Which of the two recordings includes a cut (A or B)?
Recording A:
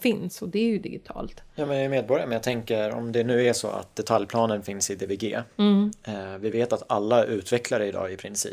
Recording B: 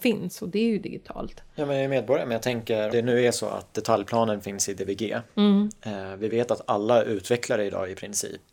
B